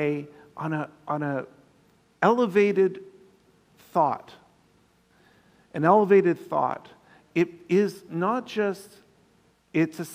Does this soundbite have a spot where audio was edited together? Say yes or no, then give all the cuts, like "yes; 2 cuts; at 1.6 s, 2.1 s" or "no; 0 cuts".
yes; 1 cut; at 7.2 s